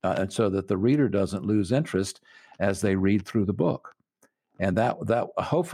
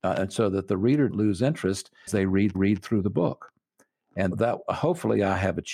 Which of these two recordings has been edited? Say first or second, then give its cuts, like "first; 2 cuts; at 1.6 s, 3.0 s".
second; 4 cuts; at 1.1 s, 2.1 s, 2.5 s, 4.3 s